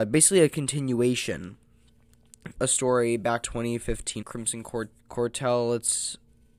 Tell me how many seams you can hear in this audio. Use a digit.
4